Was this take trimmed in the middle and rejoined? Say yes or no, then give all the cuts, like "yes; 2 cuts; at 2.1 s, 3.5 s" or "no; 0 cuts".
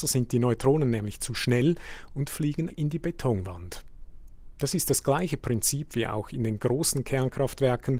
yes; 1 cut; at 2.7 s